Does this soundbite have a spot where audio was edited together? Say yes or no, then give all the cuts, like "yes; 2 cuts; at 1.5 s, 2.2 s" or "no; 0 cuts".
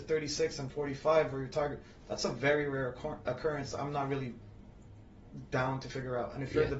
no; 0 cuts